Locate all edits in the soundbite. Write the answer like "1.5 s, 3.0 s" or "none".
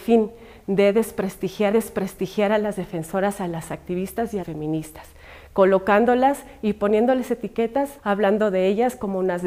1.7 s, 4.4 s, 8.0 s